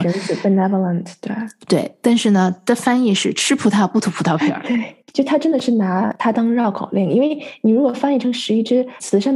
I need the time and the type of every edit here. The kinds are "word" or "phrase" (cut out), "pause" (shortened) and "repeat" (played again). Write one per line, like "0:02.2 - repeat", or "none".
0:05.0 - pause